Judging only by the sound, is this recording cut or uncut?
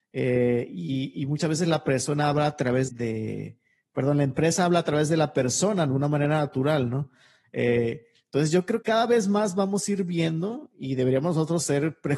cut